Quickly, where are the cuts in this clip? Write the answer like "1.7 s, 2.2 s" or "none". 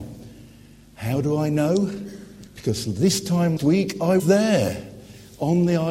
2.5 s, 3.6 s, 4.2 s